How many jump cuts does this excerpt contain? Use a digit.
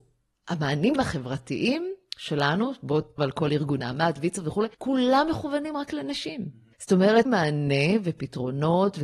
6